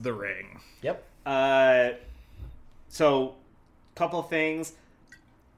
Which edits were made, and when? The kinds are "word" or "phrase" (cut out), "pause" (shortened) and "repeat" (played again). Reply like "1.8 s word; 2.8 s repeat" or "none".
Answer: none

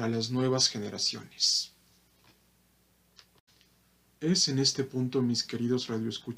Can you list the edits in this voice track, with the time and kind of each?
none

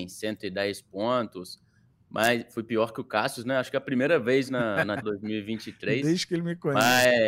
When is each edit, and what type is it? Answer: 5.0 s word

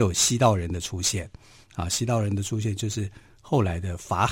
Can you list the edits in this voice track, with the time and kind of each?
none

